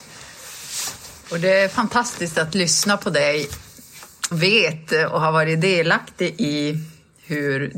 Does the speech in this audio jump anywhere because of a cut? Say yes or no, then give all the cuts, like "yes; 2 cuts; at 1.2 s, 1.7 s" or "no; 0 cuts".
yes; 1 cut; at 4.3 s